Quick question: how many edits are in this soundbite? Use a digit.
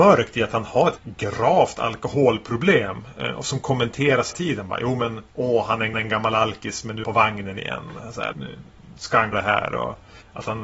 7